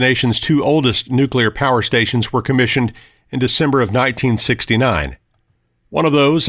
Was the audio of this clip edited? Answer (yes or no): no